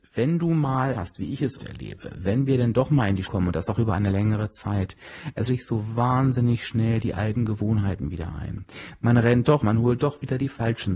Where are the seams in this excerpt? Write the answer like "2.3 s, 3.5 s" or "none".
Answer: 0.9 s, 1.6 s, 3.2 s, 5.5 s, 9.6 s